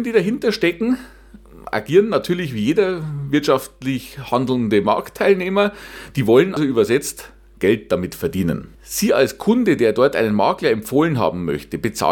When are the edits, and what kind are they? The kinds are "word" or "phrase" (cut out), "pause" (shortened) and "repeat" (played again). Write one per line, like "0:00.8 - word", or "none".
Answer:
0:06.6 - word
0:08.7 - pause

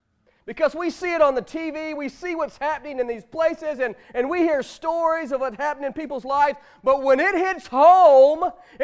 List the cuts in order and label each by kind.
none

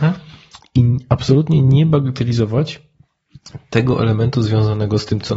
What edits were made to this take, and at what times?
none

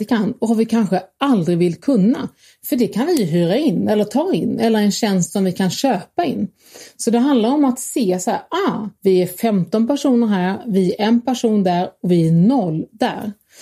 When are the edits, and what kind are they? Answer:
0:08.9 - pause

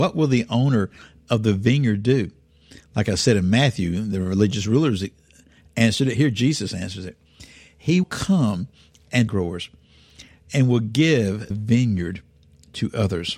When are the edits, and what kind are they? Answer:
0:08.0 - word
0:09.3 - phrase
0:11.5 - word

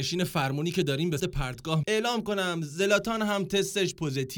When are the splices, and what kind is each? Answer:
0:01.2 - word
0:01.8 - word

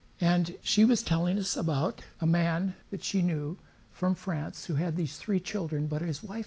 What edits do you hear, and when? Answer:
none

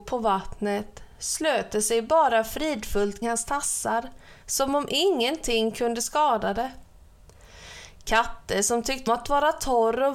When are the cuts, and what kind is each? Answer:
0:03.2 - word
0:09.1 - word

